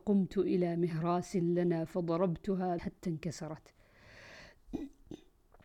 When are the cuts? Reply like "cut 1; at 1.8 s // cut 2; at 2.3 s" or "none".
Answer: cut 1; at 2.8 s

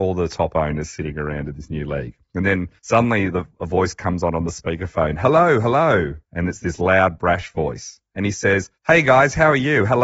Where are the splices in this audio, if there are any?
cut 1; at 2.8 s // cut 2; at 6.2 s // cut 3; at 8.8 s

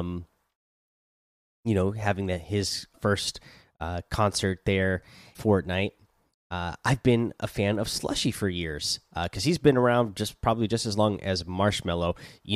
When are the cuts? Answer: cut 1; at 2.9 s // cut 2; at 5.3 s

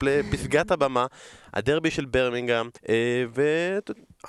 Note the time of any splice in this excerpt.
cut 1; at 2.8 s

